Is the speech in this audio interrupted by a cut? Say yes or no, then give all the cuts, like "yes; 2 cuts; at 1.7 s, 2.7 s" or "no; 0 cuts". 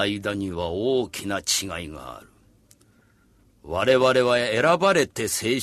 no; 0 cuts